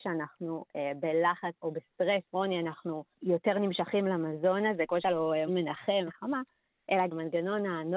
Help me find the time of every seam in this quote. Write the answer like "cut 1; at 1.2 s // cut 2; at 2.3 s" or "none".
cut 1; at 1.6 s // cut 2; at 2.3 s // cut 3; at 3.1 s // cut 4; at 5.0 s // cut 5; at 5.5 s // cut 6; at 6.1 s // cut 7; at 7.1 s